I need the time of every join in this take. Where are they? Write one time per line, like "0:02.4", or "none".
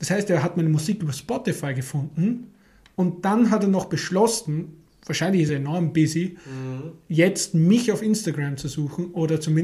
none